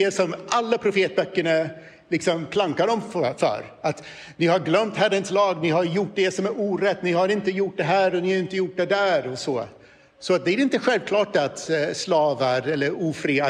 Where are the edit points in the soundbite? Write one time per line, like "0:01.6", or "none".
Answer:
none